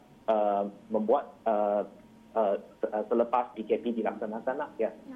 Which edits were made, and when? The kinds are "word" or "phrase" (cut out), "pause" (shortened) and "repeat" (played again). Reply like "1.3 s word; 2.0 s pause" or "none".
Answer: 3.5 s word